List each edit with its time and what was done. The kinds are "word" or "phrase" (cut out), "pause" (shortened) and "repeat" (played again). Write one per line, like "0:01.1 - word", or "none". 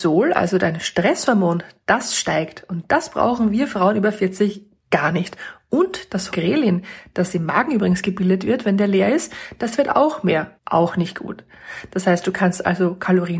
0:06.3 - word
0:10.6 - pause